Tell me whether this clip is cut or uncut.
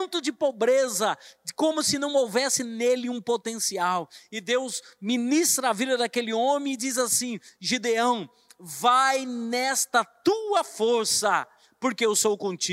uncut